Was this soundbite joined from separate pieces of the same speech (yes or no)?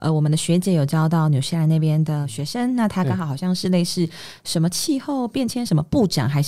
no